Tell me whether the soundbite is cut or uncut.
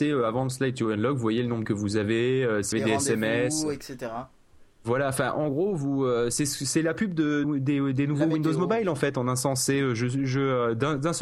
cut